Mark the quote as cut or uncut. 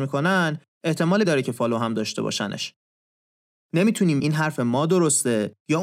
cut